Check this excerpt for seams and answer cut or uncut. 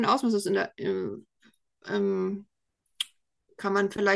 uncut